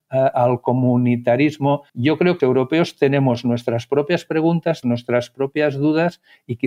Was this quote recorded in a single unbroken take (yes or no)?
no